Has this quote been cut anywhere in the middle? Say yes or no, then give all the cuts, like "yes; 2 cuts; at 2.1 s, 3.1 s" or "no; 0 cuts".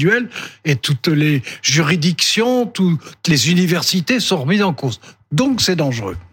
no; 0 cuts